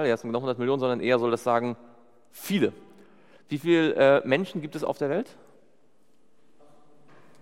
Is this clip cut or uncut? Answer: uncut